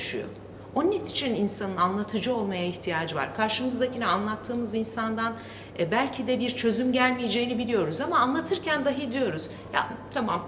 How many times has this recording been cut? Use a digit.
0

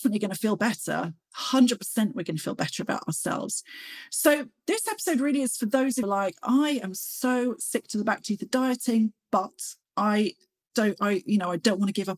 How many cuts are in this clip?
1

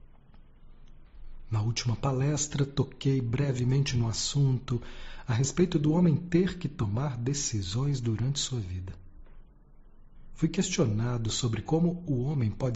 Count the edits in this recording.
0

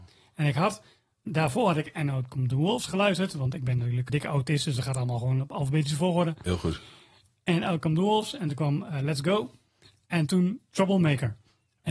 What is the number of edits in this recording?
2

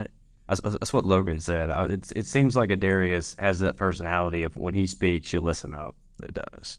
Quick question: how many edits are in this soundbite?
0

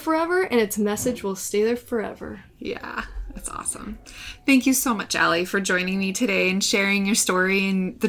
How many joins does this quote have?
0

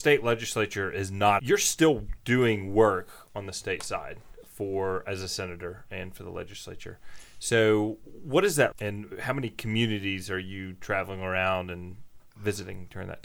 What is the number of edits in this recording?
3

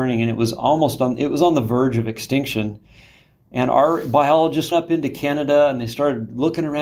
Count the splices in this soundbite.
1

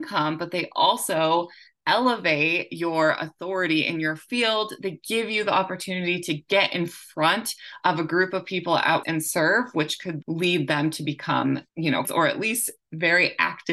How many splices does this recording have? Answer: 4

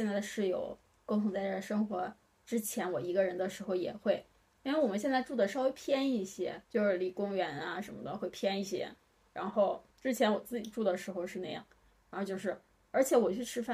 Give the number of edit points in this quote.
2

